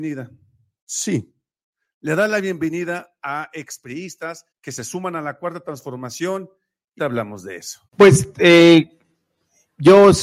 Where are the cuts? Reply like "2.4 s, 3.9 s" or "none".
4.5 s, 7.0 s, 7.9 s